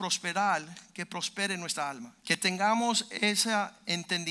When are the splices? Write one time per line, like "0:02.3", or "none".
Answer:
0:02.2

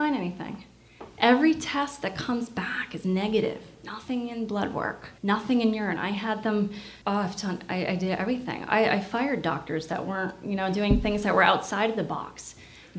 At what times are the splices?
0:05.2
0:07.0

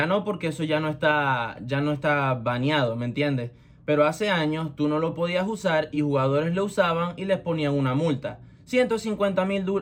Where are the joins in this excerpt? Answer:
none

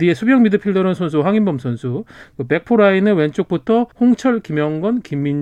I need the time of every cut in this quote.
0:01.0
0:03.9

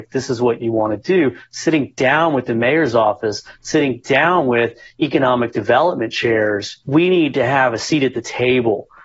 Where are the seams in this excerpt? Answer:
0:06.8

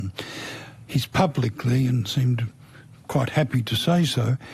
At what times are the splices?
none

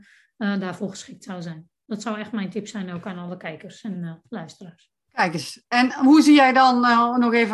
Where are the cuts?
none

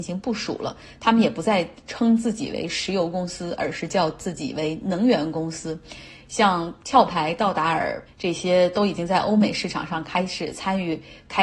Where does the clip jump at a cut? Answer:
0:08.1

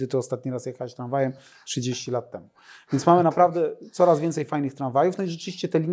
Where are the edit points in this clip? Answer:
none

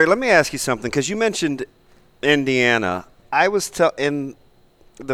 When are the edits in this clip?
0:03.2

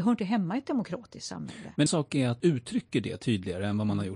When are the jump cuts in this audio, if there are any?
0:01.9
0:02.4

